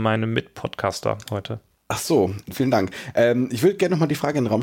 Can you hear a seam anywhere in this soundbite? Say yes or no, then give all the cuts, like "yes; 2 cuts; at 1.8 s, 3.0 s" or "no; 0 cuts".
no; 0 cuts